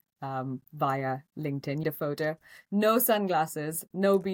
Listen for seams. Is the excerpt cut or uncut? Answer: cut